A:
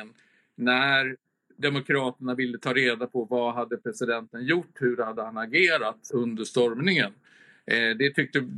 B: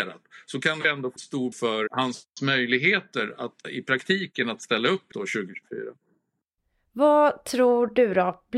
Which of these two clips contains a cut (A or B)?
B